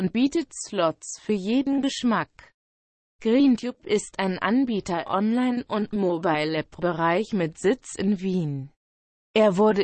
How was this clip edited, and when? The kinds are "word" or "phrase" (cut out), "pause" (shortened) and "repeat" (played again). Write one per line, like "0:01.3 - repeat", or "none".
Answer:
0:05.0 - word